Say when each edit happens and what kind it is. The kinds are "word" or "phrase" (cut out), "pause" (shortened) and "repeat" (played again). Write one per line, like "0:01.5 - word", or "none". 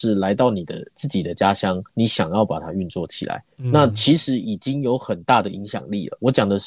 0:01.9 - pause